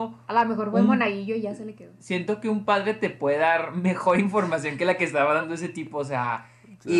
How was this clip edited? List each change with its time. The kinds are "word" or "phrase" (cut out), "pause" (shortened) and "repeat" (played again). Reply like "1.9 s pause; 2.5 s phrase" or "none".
none